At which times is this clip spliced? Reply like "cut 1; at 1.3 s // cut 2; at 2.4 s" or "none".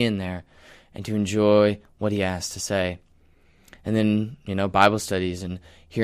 none